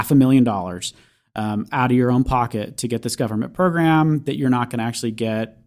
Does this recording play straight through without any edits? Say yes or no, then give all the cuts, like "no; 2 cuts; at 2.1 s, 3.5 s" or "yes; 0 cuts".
yes; 0 cuts